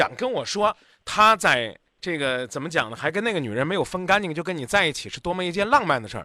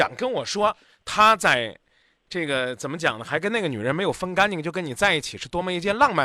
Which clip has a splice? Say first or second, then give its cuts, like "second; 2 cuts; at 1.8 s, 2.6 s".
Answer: first; 1 cut; at 1.9 s